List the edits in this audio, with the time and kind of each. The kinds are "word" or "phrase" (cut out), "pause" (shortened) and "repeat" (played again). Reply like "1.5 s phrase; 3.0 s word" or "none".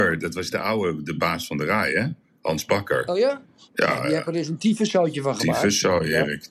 none